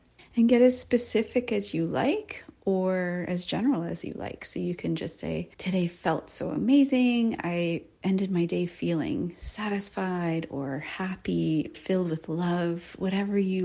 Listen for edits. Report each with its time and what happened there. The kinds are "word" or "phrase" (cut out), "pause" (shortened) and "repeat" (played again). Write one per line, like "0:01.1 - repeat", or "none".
0:05.5 - pause
0:11.7 - phrase